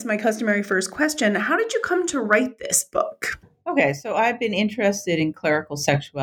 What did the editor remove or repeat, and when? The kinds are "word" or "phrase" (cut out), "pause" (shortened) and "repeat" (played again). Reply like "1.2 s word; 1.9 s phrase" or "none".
none